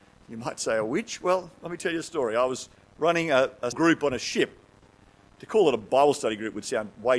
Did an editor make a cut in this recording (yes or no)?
yes